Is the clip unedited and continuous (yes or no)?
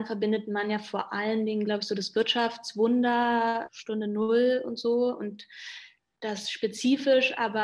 yes